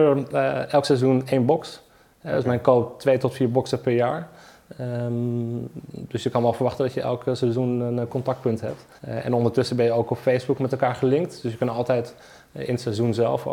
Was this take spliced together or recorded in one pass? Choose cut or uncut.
cut